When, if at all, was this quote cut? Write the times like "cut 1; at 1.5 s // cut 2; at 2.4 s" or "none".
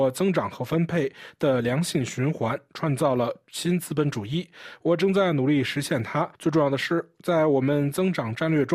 cut 1; at 6.3 s